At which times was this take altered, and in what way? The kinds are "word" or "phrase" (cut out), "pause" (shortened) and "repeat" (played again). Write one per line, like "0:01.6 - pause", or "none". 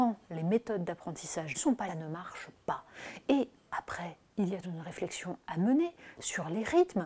0:01.5 - word
0:01.9 - phrase
0:04.6 - word